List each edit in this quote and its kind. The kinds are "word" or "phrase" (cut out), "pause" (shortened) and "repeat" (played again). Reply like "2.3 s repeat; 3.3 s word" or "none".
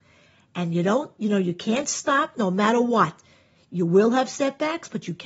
none